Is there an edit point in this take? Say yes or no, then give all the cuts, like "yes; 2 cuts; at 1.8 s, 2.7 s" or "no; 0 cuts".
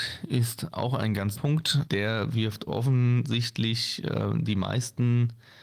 yes; 2 cuts; at 1.3 s, 1.9 s